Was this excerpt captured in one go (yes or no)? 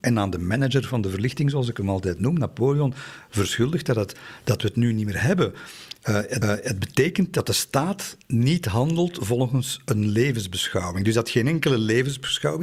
no